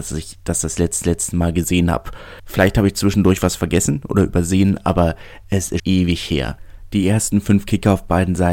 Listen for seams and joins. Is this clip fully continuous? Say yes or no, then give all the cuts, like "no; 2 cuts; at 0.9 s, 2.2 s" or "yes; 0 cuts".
no; 3 cuts; at 1.0 s, 2.4 s, 5.8 s